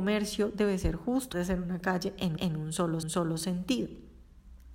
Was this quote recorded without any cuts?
no; 3 cuts; at 1.3 s, 2.4 s, 3.0 s

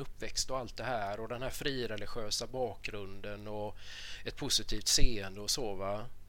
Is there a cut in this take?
no; 0 cuts

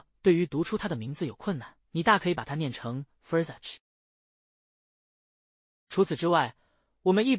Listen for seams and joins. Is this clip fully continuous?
no; 2 cuts; at 1.9 s, 3.4 s

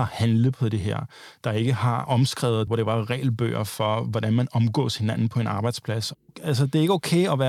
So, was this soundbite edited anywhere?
yes; 1 cut; at 2.7 s

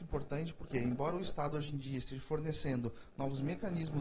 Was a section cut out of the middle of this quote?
no; 0 cuts

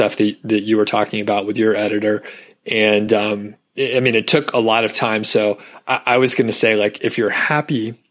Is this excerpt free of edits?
yes; 0 cuts

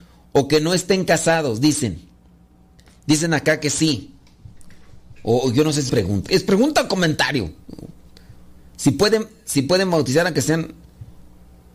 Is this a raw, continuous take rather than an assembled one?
no; 2 cuts; at 5.9 s, 6.3 s

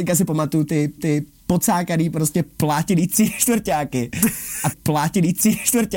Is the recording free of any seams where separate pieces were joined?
no; 2 cuts; at 1.0 s, 4.7 s

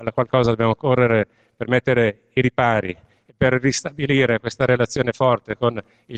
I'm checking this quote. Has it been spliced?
no; 0 cuts

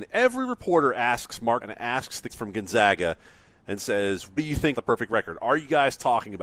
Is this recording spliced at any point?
yes; 4 cuts; at 1.6 s, 2.3 s, 4.4 s, 4.7 s

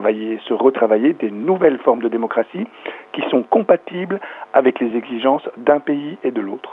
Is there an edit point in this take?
no; 0 cuts

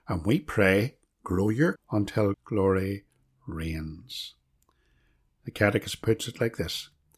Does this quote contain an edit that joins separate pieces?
yes; 3 cuts; at 1.0 s, 1.8 s, 2.3 s

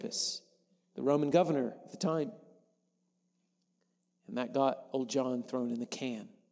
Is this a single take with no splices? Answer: yes; 0 cuts

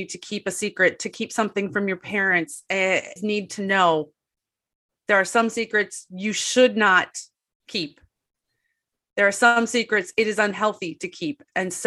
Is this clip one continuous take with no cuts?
no; 1 cut; at 3.2 s

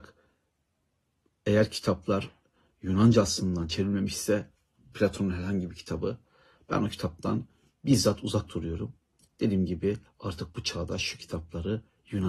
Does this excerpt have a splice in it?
no; 0 cuts

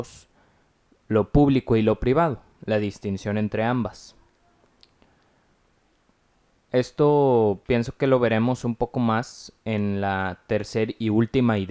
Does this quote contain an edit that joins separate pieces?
no; 0 cuts

